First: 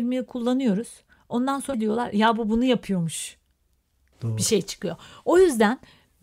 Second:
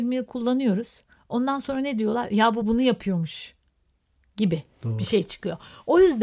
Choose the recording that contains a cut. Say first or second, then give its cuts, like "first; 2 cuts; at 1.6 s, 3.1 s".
first; 2 cuts; at 1.7 s, 4.1 s